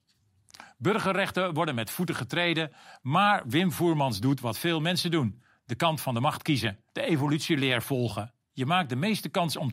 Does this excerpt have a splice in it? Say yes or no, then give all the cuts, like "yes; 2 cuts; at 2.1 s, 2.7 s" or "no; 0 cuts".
yes; 1 cut; at 6.9 s